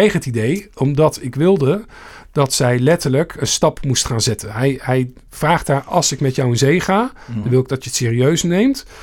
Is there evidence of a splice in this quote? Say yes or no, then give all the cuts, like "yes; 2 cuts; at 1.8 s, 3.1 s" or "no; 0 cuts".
no; 0 cuts